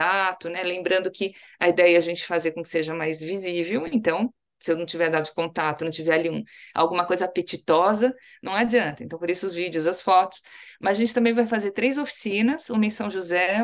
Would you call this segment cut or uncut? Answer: uncut